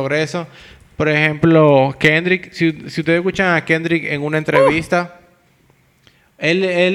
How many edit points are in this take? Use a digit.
0